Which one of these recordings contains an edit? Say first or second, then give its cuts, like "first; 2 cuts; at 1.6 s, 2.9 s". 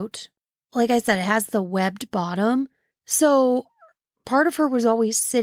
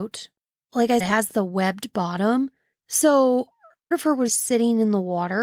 second; 3 cuts; at 1.0 s, 3.9 s, 4.3 s